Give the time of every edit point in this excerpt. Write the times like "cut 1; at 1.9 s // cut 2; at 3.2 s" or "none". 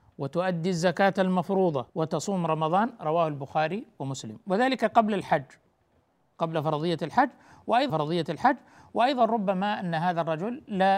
cut 1; at 1.9 s // cut 2; at 7.9 s